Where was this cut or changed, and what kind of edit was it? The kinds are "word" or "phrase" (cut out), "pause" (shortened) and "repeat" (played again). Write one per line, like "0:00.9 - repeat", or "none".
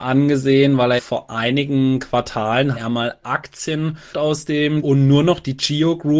0:01.0 - phrase
0:02.8 - word
0:03.2 - word
0:04.1 - word
0:04.8 - word